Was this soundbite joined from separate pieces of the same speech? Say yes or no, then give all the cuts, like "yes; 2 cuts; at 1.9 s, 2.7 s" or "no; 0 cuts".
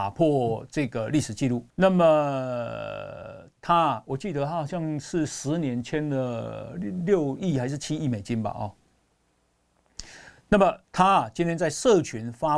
yes; 2 cuts; at 1.7 s, 10.8 s